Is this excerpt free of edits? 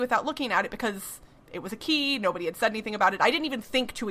yes; 0 cuts

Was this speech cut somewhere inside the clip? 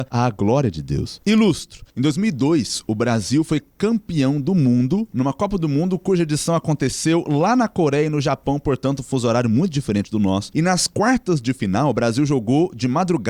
yes; 1 cut; at 1.9 s

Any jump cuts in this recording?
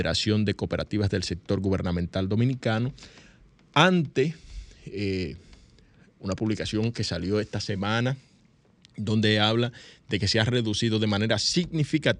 no; 0 cuts

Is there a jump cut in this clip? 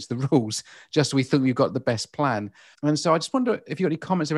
yes; 1 cut; at 2.7 s

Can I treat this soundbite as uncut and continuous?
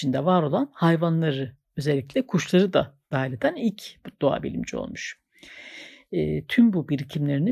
no; 1 cut; at 3.1 s

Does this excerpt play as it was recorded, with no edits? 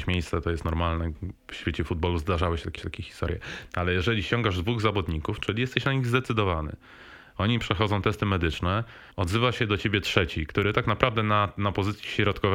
no; 2 cuts; at 2.8 s, 9.1 s

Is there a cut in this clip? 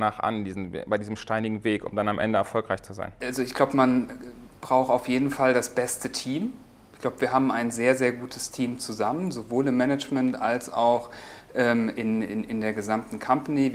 no; 0 cuts

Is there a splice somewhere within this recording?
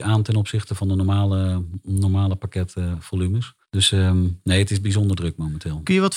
yes; 1 cut; at 3.6 s

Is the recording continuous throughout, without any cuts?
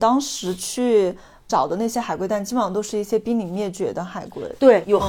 yes; 0 cuts

